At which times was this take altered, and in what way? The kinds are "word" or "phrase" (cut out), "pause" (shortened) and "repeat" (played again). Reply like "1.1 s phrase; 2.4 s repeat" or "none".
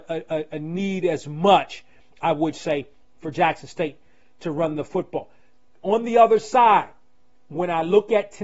none